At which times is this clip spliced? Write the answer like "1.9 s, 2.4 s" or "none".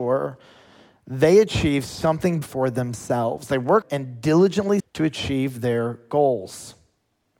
2.4 s, 3.8 s, 4.8 s